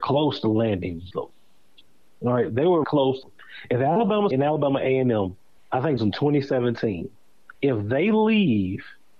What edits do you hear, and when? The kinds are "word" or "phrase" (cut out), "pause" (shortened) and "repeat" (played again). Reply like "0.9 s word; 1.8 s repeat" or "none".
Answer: 1.1 s word; 2.8 s word; 3.2 s phrase; 4.3 s word; 5.6 s pause; 6.0 s phrase; 7.5 s pause